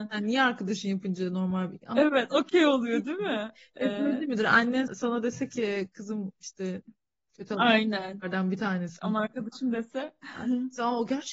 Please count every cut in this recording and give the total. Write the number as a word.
one